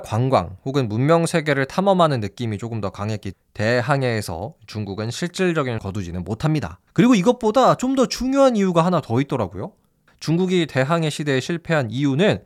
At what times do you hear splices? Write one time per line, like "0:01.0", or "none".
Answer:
0:03.3
0:05.8
0:06.9